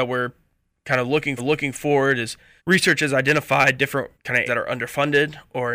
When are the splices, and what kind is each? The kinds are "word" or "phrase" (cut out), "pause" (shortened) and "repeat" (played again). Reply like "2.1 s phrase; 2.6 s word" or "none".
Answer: 1.4 s repeat; 2.6 s pause; 4.1 s pause; 4.5 s word